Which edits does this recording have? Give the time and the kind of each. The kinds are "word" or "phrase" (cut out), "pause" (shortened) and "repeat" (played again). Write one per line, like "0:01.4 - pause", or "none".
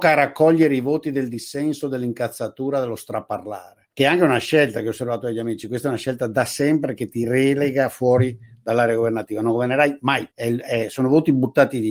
0:03.9 - pause
0:10.3 - pause